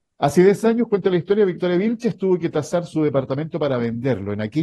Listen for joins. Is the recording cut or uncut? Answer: uncut